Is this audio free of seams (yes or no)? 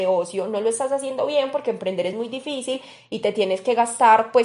yes